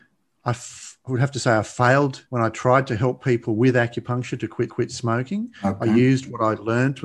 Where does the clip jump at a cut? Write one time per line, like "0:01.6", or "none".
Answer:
0:02.3
0:04.7